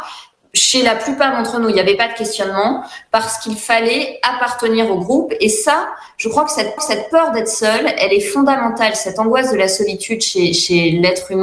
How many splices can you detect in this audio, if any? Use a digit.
1